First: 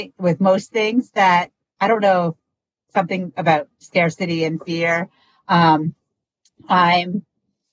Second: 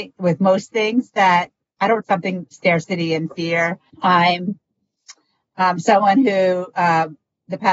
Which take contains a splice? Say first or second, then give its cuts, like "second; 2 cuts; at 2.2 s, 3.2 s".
second; 3 cuts; at 2.0 s, 2.5 s, 3.9 s